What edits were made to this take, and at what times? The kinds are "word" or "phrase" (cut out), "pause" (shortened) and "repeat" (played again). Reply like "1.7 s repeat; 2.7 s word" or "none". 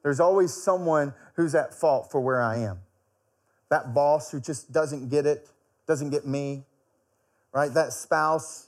none